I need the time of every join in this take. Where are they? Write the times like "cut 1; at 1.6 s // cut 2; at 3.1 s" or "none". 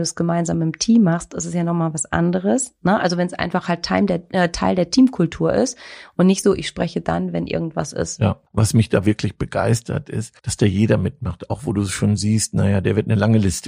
cut 1; at 8.5 s // cut 2; at 10.4 s

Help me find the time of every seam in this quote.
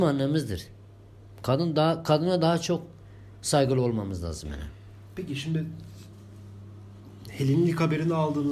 none

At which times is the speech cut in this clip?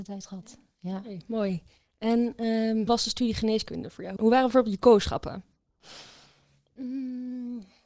cut 1; at 2.9 s // cut 2; at 4.2 s

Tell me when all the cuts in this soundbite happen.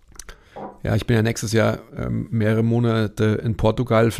none

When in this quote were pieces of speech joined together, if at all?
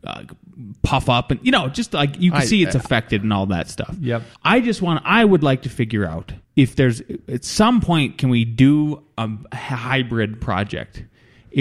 cut 1; at 4.3 s // cut 2; at 6.4 s

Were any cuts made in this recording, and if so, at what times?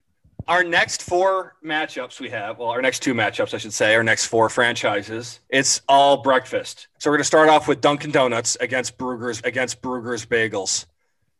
cut 1; at 5.4 s // cut 2; at 6.9 s // cut 3; at 9.4 s

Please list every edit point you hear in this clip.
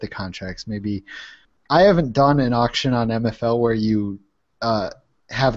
none

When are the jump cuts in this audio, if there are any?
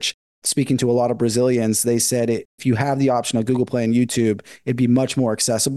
cut 1; at 2.6 s

